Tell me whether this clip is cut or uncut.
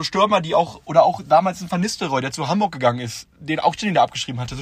uncut